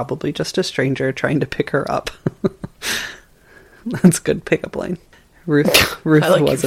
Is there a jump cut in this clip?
no; 0 cuts

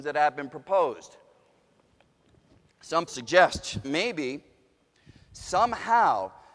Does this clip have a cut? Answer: yes; 2 cuts; at 3.1 s, 3.8 s

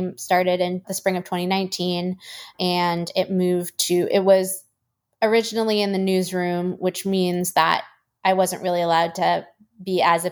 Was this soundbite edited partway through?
no; 0 cuts

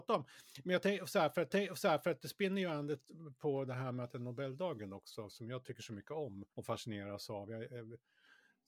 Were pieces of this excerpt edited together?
yes; 2 cuts; at 1.5 s, 6.5 s

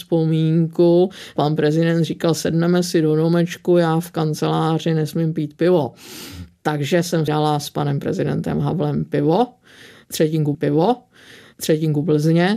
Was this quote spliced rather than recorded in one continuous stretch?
yes; 2 cuts; at 7.3 s, 10.5 s

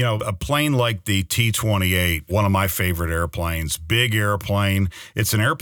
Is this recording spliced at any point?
no; 0 cuts

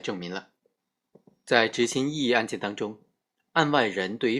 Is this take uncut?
yes; 0 cuts

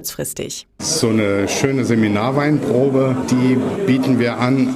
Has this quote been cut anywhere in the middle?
no; 0 cuts

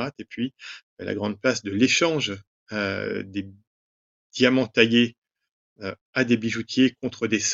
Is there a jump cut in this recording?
no; 0 cuts

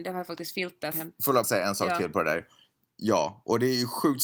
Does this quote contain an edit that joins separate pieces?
yes; 2 cuts; at 0.9 s, 1.4 s

